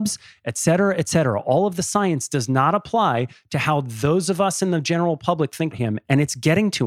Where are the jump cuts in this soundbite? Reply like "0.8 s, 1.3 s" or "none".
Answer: 5.7 s